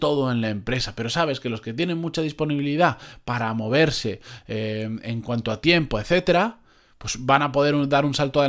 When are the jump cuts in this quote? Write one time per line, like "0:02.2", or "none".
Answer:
none